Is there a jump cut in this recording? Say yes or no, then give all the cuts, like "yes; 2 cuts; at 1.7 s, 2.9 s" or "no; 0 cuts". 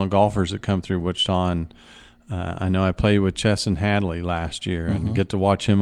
no; 0 cuts